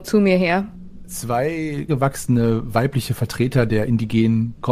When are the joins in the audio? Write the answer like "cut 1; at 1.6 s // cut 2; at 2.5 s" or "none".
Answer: cut 1; at 1.9 s